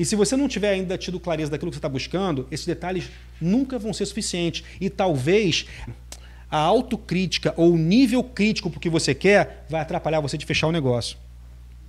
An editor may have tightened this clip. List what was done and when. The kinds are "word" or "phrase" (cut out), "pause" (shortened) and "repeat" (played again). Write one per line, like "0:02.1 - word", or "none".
0:05.9 - word

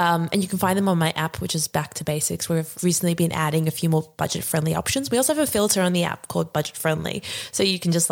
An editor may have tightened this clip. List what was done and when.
0:02.7 - word

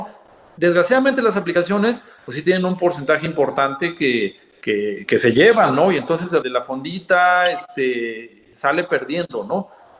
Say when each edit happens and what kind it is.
0:05.1 - word
0:06.4 - phrase

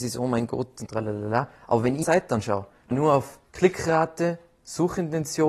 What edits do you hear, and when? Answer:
0:01.5 - pause
0:02.0 - word
0:02.9 - word
0:03.4 - pause

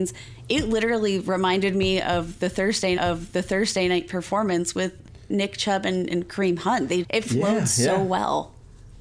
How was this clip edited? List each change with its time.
0:03.0 - repeat
0:07.0 - word

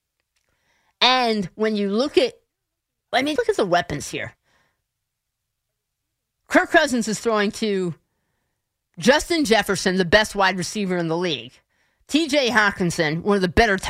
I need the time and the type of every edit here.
0:03.4 - word

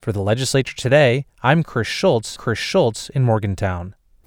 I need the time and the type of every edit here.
0:01.3 - pause
0:02.4 - repeat

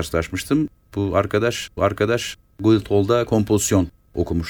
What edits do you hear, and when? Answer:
0:01.8 - repeat

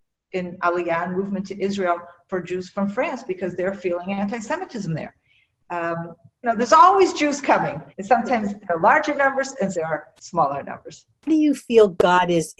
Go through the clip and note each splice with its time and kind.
0:02.3 - word
0:06.4 - phrase
0:07.9 - pause
0:09.7 - word
0:10.2 - pause

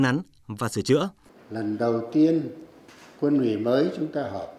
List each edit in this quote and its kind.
none

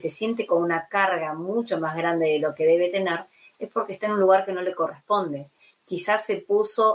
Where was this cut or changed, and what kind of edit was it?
none

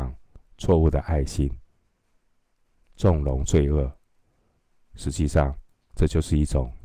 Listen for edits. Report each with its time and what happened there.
none

